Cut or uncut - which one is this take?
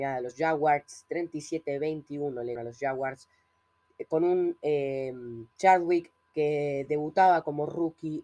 cut